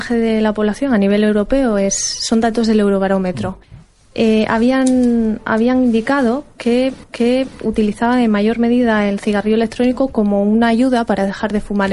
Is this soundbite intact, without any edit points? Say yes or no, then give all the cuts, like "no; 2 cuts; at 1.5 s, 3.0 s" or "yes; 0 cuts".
no; 2 cuts; at 3.6 s, 7.0 s